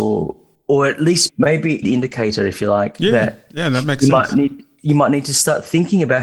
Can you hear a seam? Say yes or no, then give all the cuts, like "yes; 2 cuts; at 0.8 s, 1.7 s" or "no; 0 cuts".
yes; 2 cuts; at 1.3 s, 1.8 s